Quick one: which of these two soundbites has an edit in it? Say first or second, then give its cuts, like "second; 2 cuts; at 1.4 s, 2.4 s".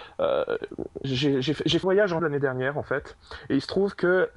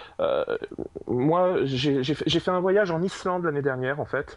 first; 3 cuts; at 1.0 s, 1.8 s, 2.2 s